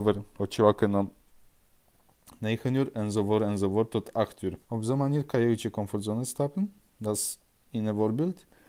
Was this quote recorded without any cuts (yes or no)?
no